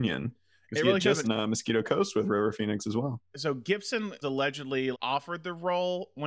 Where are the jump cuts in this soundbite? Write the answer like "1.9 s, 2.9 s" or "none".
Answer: 1.2 s, 4.2 s, 4.9 s

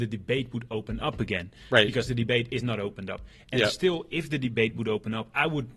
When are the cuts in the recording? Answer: none

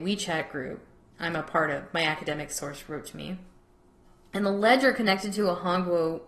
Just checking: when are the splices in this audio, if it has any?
none

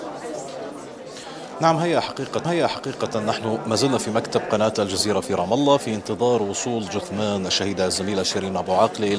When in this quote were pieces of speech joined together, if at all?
2.4 s

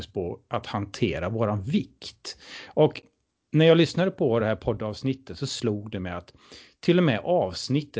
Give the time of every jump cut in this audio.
none

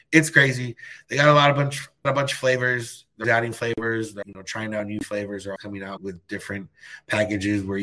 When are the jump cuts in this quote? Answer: 2.0 s, 3.2 s, 4.2 s, 5.6 s, 6.0 s

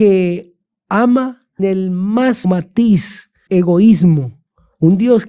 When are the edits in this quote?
1.6 s, 2.4 s, 3.5 s

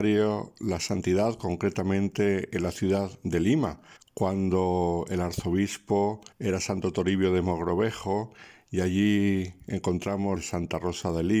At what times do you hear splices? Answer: 4.0 s, 6.3 s, 10.4 s

